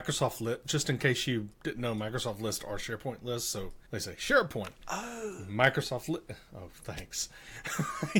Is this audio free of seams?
no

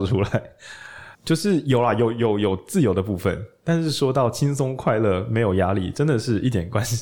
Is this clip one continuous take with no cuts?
no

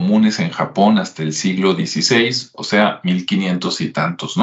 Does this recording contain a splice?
no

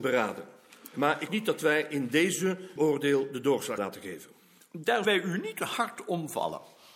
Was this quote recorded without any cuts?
no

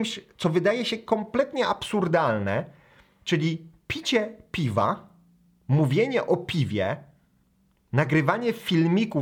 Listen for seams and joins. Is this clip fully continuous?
yes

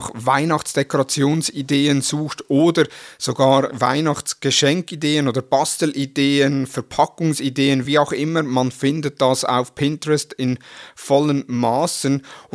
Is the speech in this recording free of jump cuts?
yes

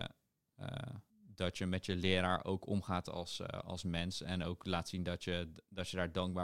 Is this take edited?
yes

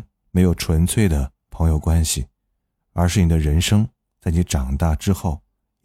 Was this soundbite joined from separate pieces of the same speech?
no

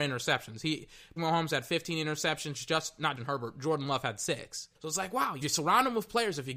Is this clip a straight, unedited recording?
no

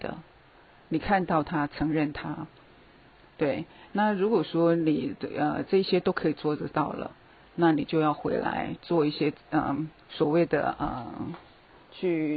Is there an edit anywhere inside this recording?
yes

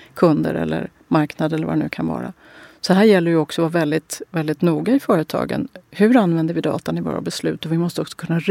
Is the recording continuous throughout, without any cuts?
yes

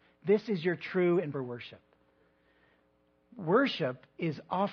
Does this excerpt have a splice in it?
yes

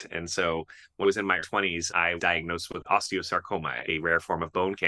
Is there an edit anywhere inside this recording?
yes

